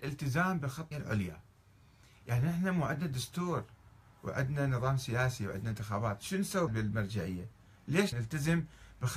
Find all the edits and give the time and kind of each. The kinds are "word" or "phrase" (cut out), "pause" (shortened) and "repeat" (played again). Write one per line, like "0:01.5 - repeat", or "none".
0:00.9 - word
0:06.7 - word
0:08.1 - word

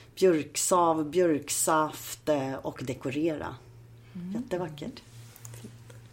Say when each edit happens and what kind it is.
none

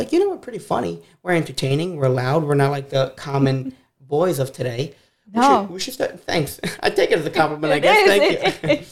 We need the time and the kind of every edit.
none

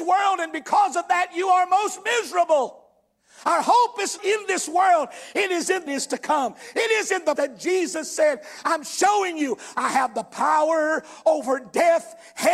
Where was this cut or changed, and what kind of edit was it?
0:04.2 - word
0:05.9 - phrase
0:07.4 - word

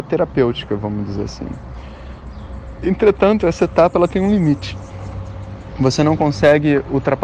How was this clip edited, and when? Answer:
none

